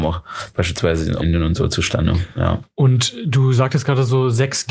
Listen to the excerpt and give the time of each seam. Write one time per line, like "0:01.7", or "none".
0:01.2